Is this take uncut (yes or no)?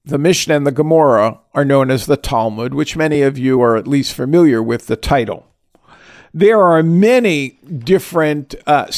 yes